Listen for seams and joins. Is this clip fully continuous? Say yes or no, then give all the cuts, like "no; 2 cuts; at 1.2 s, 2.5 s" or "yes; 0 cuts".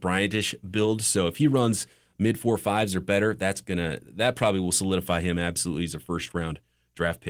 yes; 0 cuts